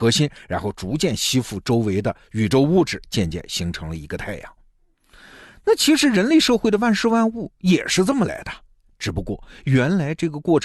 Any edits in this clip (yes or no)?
no